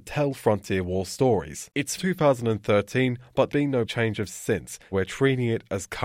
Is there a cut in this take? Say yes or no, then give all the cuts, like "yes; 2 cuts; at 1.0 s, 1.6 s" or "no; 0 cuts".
yes; 5 cuts; at 2.0 s, 3.5 s, 3.9 s, 4.3 s, 4.9 s